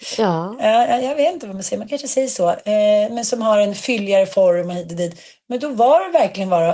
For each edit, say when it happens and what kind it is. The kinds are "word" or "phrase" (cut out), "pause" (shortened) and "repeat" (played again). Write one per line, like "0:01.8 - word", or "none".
none